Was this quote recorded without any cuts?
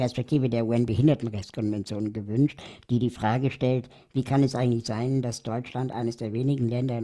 yes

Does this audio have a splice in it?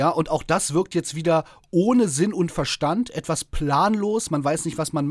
no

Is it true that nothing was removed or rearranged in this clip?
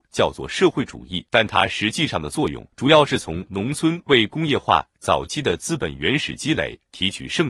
no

